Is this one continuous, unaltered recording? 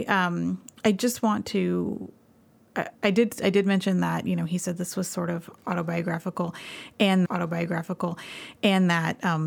no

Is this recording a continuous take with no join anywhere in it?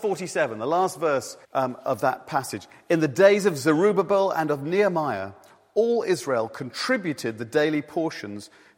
no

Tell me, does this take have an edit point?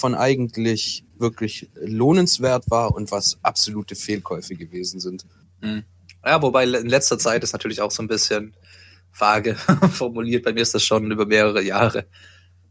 no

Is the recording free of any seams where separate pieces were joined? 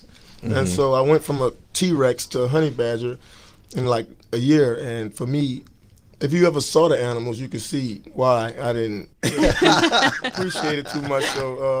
yes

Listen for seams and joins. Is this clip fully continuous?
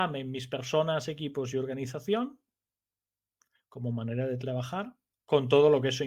yes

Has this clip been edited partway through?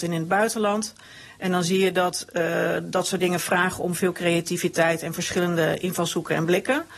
no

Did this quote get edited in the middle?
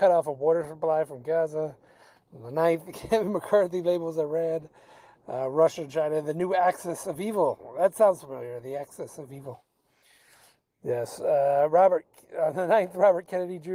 no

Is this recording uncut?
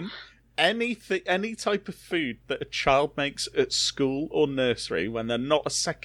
yes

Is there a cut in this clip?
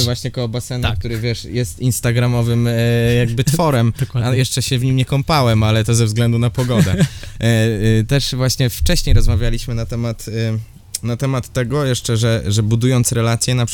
no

